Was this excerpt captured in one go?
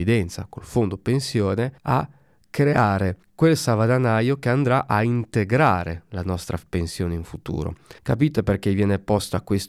no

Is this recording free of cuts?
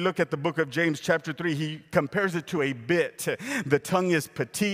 yes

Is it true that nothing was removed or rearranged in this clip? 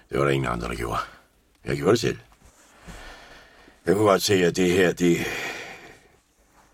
yes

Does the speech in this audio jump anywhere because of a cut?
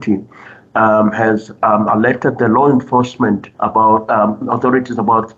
yes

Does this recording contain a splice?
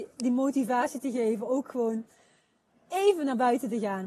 yes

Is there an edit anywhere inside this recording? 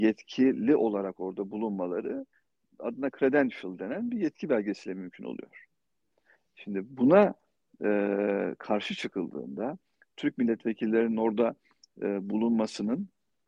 no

